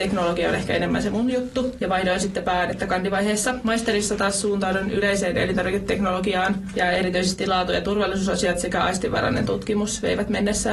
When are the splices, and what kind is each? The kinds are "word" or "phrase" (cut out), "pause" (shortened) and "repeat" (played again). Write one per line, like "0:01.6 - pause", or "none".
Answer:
none